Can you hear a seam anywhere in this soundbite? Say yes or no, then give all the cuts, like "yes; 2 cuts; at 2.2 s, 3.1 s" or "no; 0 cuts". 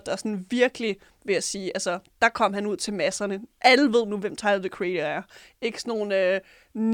no; 0 cuts